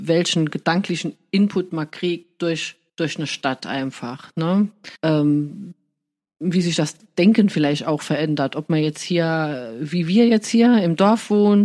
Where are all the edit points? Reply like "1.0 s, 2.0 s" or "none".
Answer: 2.9 s, 5.0 s